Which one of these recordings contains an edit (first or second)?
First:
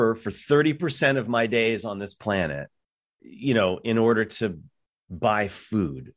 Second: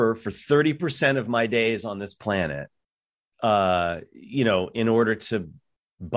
first